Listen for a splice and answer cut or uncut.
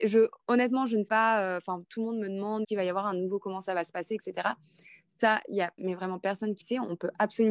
cut